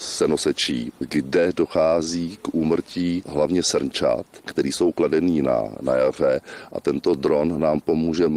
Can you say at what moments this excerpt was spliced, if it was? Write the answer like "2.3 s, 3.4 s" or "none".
none

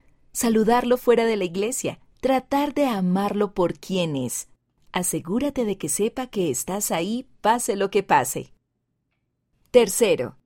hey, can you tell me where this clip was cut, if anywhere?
2.1 s

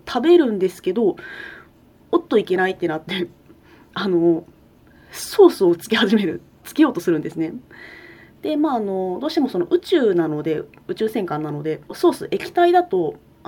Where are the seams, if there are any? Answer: 11.8 s

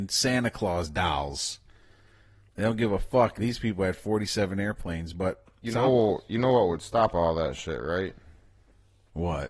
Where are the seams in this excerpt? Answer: none

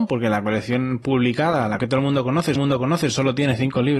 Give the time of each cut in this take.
1.8 s, 2.5 s

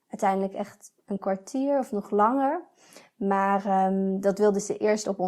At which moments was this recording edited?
none

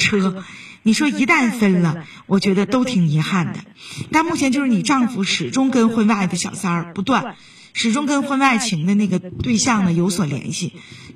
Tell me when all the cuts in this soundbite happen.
none

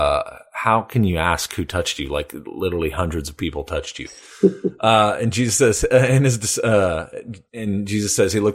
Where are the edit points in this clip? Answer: none

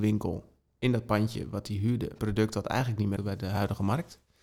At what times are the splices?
2.2 s, 3.2 s

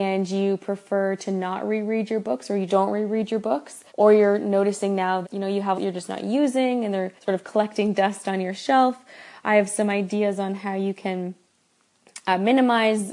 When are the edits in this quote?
2.7 s, 3.9 s, 5.2 s, 5.7 s, 7.2 s

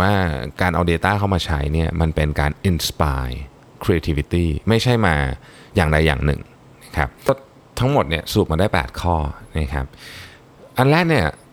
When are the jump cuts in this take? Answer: none

